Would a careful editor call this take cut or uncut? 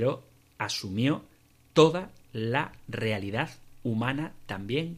uncut